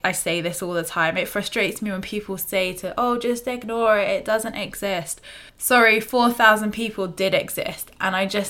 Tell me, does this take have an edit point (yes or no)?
yes